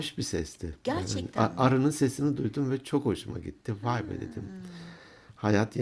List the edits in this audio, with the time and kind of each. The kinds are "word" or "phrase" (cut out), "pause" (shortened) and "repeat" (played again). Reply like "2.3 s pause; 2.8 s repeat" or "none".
none